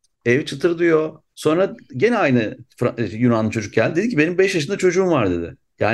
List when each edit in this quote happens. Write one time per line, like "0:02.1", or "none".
0:01.3